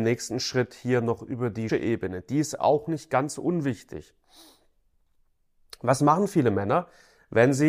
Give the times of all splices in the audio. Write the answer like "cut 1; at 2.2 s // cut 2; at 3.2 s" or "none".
cut 1; at 1.7 s

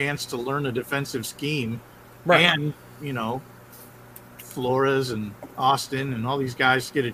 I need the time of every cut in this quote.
none

